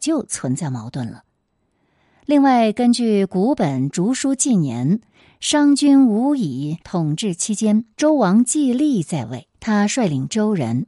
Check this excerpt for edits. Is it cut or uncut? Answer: cut